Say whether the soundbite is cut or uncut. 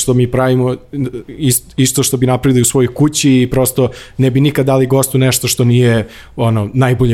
uncut